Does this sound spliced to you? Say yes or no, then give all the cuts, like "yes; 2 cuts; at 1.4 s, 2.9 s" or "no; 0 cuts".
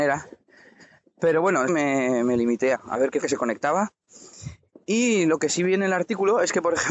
yes; 3 cuts; at 1.7 s, 2.7 s, 3.2 s